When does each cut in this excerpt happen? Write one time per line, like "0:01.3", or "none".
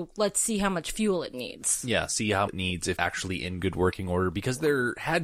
0:02.5
0:03.0

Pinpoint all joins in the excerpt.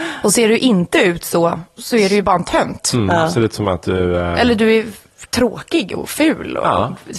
0:01.7

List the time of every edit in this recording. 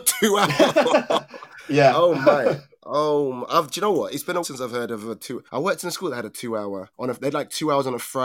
0:04.4
0:05.5
0:06.9

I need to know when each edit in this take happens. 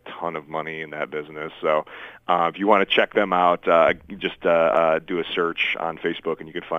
none

